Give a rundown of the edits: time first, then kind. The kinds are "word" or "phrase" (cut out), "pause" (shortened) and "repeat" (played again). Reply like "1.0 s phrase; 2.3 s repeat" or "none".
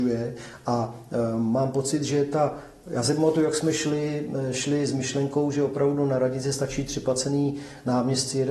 none

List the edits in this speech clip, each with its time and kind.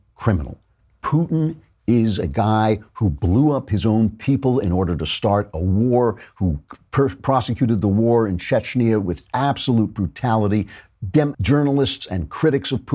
9.3 s word; 11.3 s word

